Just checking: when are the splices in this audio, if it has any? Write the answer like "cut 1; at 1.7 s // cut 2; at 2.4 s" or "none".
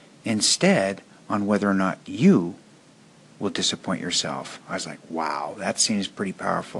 none